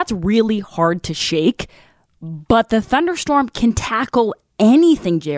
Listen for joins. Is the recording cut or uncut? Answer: uncut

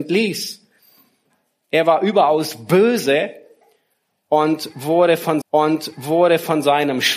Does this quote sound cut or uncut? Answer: cut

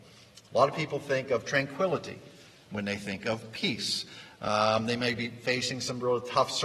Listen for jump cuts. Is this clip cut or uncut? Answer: uncut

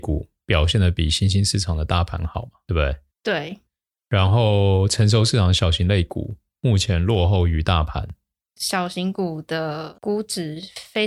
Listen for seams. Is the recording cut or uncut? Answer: uncut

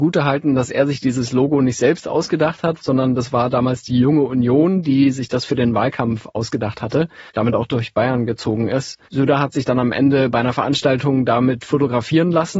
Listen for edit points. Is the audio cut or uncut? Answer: cut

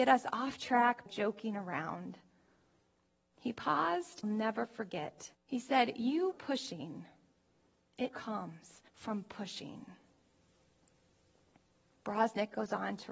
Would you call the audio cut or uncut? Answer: cut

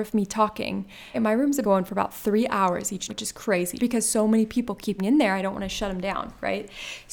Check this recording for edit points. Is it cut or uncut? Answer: cut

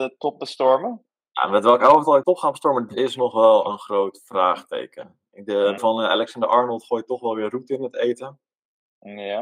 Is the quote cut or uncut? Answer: cut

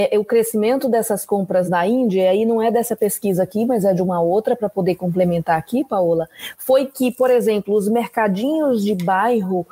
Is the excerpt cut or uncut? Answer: uncut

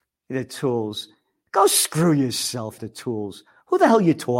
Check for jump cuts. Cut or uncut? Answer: cut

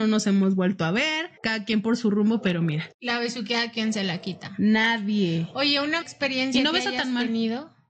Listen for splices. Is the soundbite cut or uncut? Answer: cut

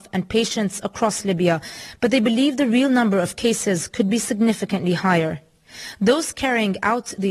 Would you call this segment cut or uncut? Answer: uncut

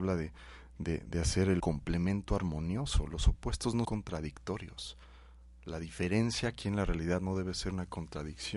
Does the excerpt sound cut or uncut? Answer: cut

